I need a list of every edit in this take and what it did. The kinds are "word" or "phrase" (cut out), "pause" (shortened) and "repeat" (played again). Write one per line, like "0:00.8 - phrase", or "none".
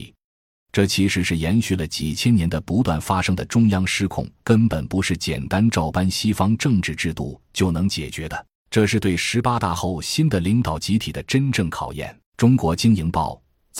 0:04.4 - pause
0:08.6 - pause
0:12.3 - pause